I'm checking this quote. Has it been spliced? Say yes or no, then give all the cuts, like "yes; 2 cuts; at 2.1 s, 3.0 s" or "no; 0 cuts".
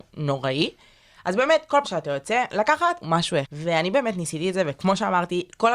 yes; 3 cuts; at 1.8 s, 3.0 s, 3.4 s